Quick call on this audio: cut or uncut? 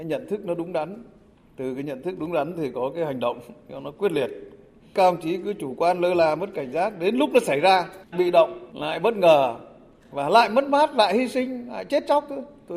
cut